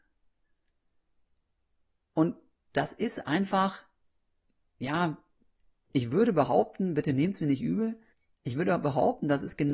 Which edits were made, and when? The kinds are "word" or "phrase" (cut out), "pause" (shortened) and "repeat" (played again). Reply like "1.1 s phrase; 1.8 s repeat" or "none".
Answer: 8.1 s pause

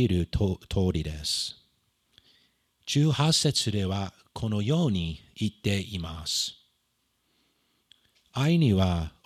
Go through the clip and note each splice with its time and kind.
2.1 s pause

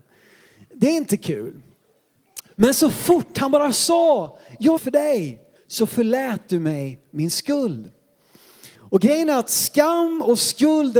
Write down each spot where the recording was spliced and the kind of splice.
4.8 s phrase; 5.6 s pause; 8.7 s pause

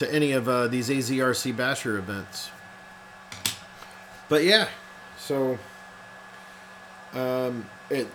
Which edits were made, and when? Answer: none

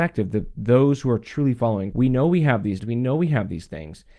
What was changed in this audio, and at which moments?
1.9 s word; 2.8 s word

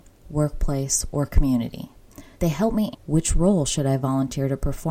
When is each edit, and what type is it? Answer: 2.3 s pause; 2.9 s phrase

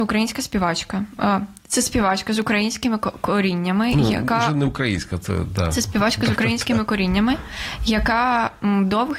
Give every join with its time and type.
none

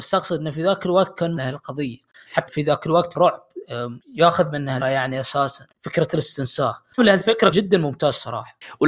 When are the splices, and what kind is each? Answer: 1.4 s phrase; 2.5 s phrase; 3.1 s word; 4.0 s pause; 4.8 s word; 5.7 s pause; 7.0 s word; 7.5 s word

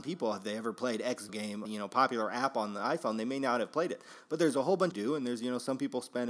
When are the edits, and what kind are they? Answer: 1.3 s word; 1.6 s word; 4.9 s phrase

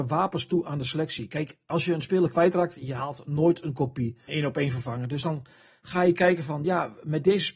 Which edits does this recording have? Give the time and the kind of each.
4.3 s word

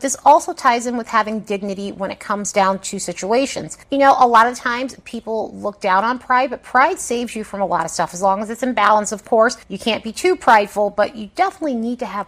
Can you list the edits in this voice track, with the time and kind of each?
none

